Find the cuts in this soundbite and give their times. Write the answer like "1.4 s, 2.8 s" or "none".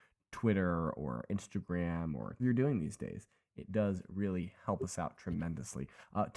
2.4 s